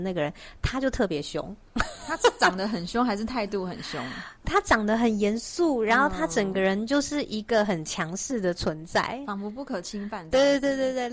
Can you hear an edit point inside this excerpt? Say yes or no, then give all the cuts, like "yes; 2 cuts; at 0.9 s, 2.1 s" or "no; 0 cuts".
yes; 1 cut; at 4.4 s